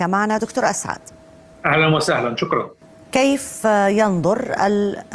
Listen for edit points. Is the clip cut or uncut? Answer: uncut